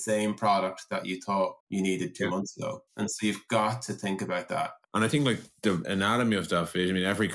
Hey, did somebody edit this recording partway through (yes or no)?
yes